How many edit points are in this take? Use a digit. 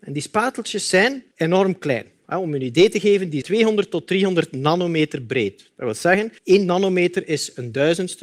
3